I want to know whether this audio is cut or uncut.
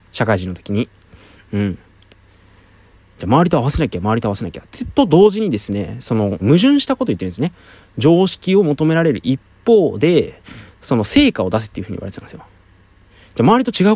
cut